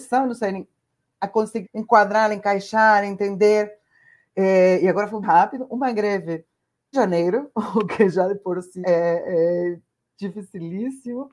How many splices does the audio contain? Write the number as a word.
four